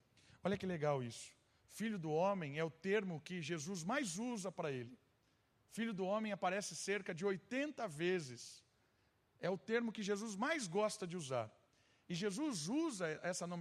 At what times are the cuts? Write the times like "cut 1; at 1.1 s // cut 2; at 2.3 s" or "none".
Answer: none

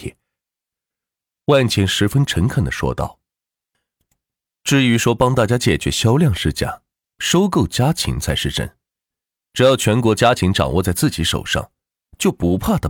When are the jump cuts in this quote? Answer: none

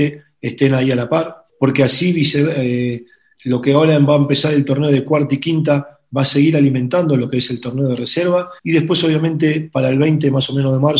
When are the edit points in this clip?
cut 1; at 1.5 s // cut 2; at 3.3 s // cut 3; at 8.6 s

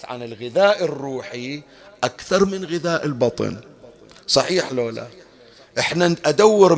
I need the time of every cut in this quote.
none

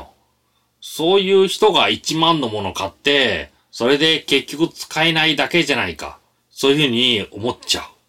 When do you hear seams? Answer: cut 1; at 3.6 s // cut 2; at 6.3 s

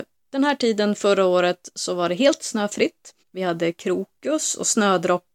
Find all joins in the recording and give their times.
cut 1; at 3.2 s

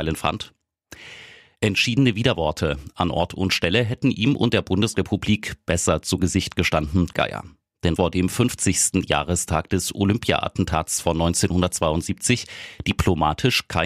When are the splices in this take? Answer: cut 1; at 7.1 s // cut 2; at 8.0 s

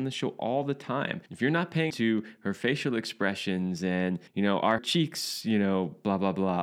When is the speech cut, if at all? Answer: cut 1; at 1.3 s // cut 2; at 1.9 s // cut 3; at 4.3 s // cut 4; at 4.8 s

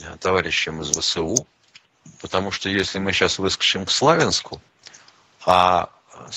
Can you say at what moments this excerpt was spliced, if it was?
none

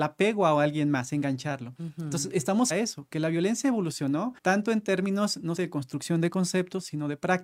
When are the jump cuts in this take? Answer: cut 1; at 2.7 s // cut 2; at 4.4 s // cut 3; at 5.6 s

